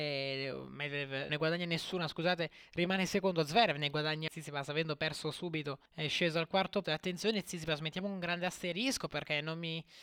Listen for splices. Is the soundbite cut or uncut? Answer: cut